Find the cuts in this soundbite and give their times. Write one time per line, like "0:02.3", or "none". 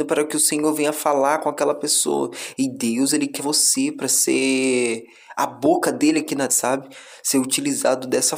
0:03.4
0:06.5